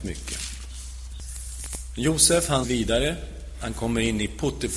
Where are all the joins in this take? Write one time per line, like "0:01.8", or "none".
0:02.6